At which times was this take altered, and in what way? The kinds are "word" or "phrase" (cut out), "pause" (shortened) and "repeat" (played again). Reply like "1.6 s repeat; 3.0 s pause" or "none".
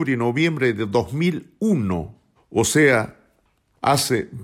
2.4 s pause